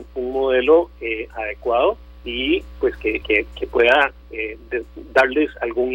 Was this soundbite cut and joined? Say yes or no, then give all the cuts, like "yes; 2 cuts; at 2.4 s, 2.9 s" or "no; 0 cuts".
yes; 1 cut; at 3.2 s